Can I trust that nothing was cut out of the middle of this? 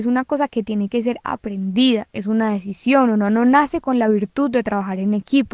yes; 0 cuts

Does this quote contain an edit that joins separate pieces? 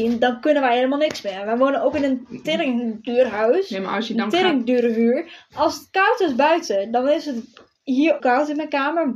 yes; 1 cut; at 8.2 s

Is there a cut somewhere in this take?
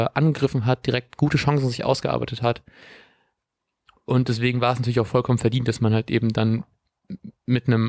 no; 0 cuts

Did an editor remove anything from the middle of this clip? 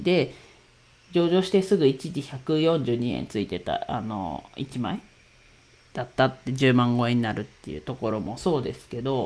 no; 0 cuts

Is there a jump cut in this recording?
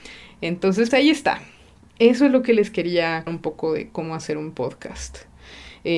yes; 2 cuts; at 0.9 s, 3.3 s

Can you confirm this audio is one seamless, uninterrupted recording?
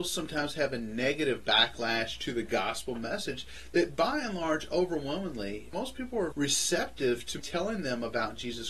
no; 1 cut; at 6.3 s

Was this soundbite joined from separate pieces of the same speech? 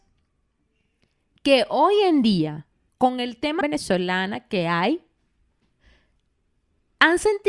yes; 2 cuts; at 2.9 s, 3.6 s

